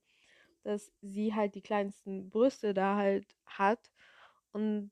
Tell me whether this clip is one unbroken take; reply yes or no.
no